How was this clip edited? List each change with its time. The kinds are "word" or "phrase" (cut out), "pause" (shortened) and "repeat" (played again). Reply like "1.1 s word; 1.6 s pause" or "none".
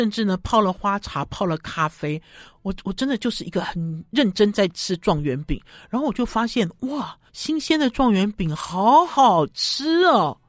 7.3 s pause